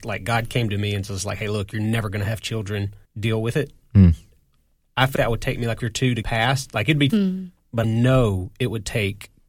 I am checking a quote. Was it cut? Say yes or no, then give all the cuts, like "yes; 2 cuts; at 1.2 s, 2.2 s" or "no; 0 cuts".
yes; 6 cuts; at 3.1 s, 5.2 s, 5.8 s, 6.2 s, 7.1 s, 7.8 s